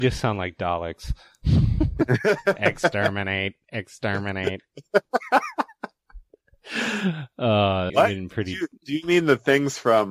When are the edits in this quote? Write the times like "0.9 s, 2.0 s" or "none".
7.9 s